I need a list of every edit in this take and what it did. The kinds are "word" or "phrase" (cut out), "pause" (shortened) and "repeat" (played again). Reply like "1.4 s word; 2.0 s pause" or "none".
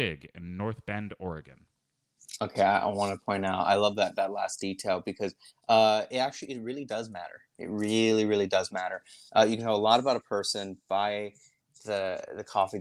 none